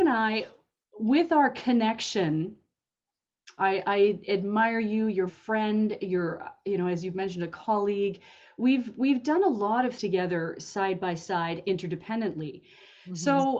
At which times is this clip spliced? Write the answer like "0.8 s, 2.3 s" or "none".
3.6 s, 5.3 s, 10.0 s, 11.6 s